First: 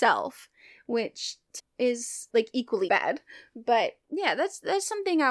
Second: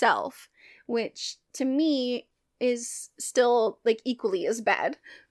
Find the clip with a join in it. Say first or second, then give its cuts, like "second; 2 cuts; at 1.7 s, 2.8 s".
first; 3 cuts; at 1.6 s, 2.3 s, 2.9 s